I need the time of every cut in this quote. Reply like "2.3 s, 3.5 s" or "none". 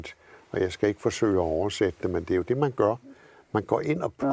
none

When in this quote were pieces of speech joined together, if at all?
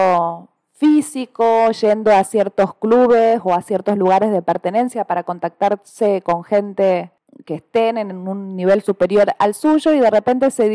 none

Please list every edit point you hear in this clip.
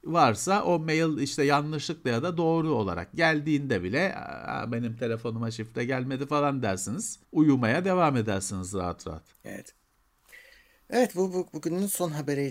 7.2 s, 9.3 s

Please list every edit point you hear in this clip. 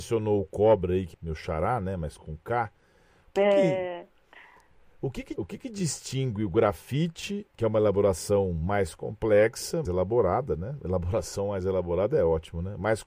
1.1 s, 2.2 s, 5.4 s, 7.5 s, 9.8 s

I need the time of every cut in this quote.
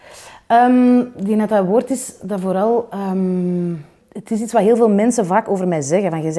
none

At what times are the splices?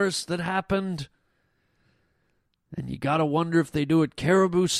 none

